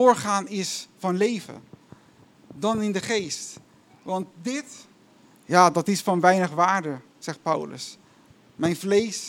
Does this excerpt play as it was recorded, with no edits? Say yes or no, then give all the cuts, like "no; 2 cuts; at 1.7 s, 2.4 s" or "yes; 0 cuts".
yes; 0 cuts